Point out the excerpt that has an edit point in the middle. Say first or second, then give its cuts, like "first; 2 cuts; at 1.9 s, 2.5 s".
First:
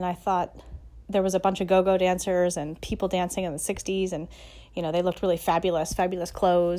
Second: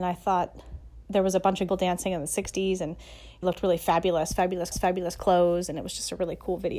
second; 3 cuts; at 1.7 s, 3.4 s, 4.7 s